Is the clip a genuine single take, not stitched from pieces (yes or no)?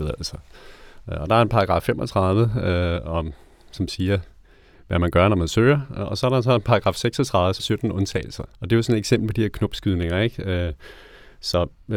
no